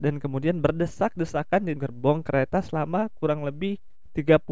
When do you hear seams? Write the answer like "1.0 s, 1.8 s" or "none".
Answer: 1.8 s